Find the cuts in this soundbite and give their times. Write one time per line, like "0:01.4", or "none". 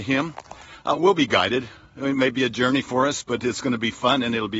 none